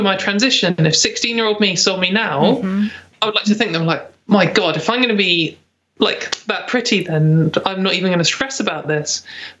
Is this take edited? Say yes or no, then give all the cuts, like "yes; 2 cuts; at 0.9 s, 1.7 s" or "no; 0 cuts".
no; 0 cuts